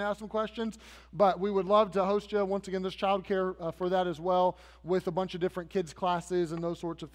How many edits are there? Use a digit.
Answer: 0